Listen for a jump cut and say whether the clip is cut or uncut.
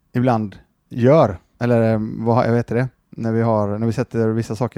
uncut